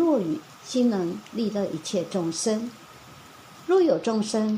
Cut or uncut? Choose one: uncut